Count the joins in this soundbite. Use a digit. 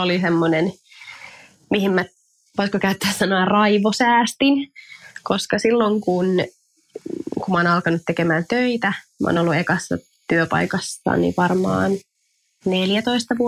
0